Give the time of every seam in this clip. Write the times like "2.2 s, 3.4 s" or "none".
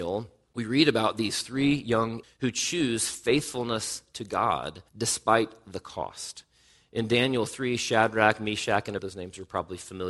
2.2 s, 4.9 s, 9.0 s